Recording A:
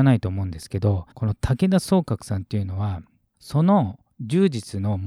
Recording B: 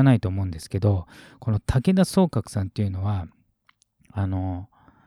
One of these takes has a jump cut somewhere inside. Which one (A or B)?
A